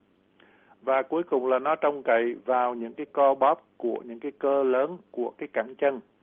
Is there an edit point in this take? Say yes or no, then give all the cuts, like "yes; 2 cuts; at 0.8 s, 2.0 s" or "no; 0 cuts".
yes; 1 cut; at 5.1 s